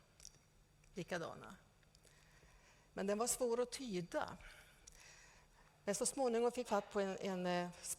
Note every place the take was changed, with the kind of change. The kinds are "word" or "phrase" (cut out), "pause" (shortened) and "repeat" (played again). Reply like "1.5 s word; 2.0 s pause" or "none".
6.6 s word